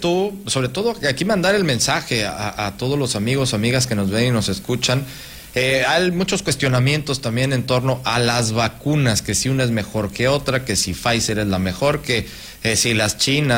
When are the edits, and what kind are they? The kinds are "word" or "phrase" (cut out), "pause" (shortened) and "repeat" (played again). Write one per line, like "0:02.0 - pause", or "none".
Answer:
none